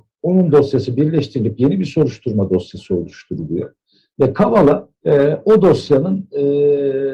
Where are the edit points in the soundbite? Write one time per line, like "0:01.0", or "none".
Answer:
0:05.0